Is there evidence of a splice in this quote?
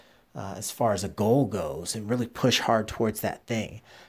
no; 0 cuts

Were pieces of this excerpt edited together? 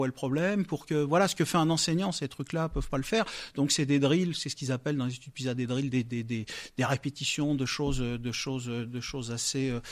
no; 0 cuts

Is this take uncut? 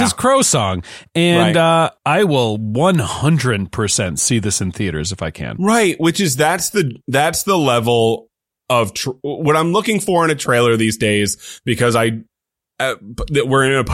yes; 0 cuts

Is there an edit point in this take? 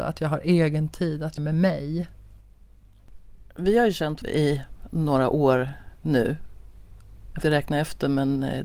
yes; 4 cuts; at 1.4 s, 4.2 s, 5.9 s, 7.4 s

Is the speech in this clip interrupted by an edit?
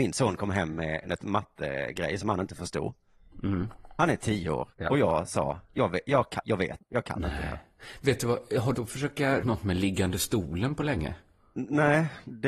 yes; 6 cuts; at 4.7 s, 5.6 s, 6.4 s, 6.8 s, 8.7 s, 9.4 s

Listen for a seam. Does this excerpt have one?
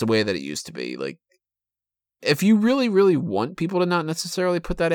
no; 0 cuts

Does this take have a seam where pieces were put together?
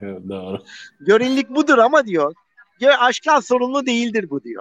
no; 0 cuts

